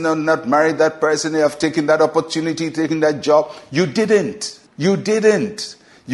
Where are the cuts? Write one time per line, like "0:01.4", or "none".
0:04.7